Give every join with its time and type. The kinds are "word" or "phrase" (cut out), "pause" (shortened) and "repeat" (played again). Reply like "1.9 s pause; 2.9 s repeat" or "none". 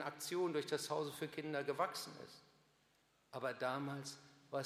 none